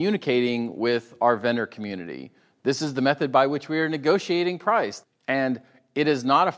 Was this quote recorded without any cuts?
yes; 0 cuts

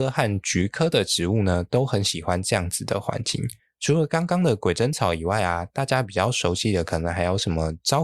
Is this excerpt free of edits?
no; 1 cut; at 3.6 s

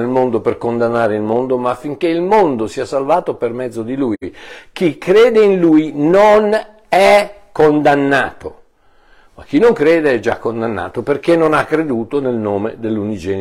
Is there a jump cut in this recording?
no; 0 cuts

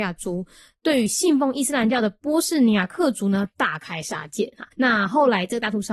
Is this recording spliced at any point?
yes; 1 cut; at 4.7 s

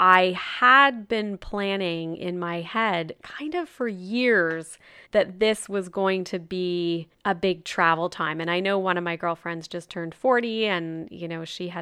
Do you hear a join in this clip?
yes; 2 cuts; at 5.1 s, 7.1 s

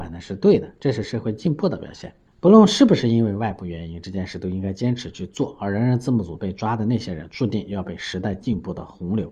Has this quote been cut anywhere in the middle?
no; 0 cuts

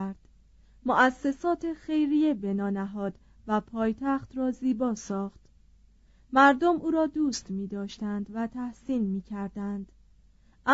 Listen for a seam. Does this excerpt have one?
no; 0 cuts

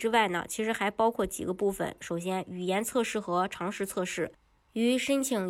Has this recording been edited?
no; 0 cuts

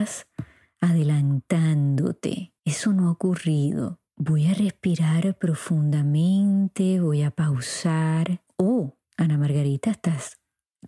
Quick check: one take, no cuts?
no; 1 cut; at 2.6 s

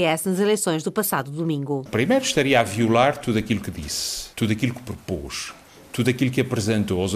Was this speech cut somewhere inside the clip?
yes; 1 cut; at 4.3 s

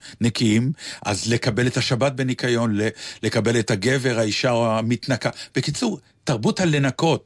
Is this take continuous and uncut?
yes; 0 cuts

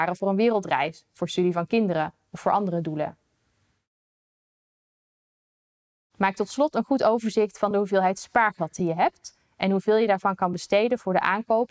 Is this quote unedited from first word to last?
yes; 0 cuts

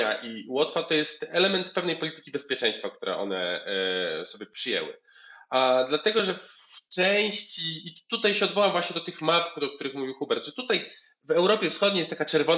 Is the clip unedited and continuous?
yes; 0 cuts

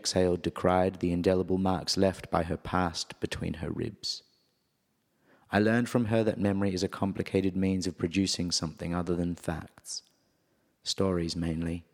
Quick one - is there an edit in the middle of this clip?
no; 0 cuts

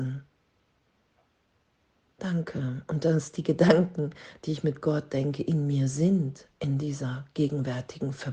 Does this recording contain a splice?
no; 0 cuts

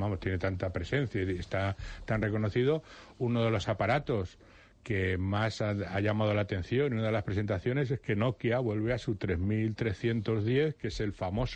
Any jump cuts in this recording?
no; 0 cuts

